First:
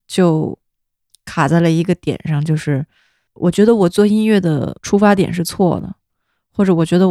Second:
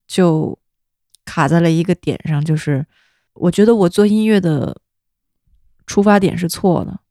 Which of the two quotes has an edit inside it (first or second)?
first